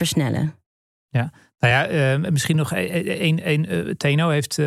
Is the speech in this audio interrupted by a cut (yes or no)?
no